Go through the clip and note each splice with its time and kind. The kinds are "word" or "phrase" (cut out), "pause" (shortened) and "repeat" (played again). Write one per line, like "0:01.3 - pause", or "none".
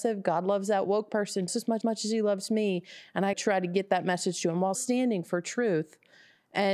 0:01.5 - word
0:01.8 - repeat
0:03.3 - phrase
0:04.7 - word